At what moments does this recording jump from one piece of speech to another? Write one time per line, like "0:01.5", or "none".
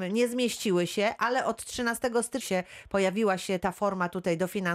0:02.4
0:03.6